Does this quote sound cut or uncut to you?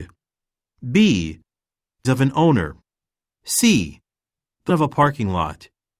cut